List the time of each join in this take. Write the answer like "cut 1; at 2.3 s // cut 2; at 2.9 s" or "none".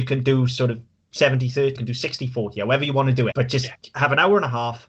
cut 1; at 1.8 s // cut 2; at 3.3 s